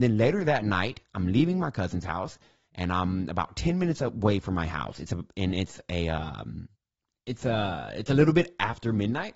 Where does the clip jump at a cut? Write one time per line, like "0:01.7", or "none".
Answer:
none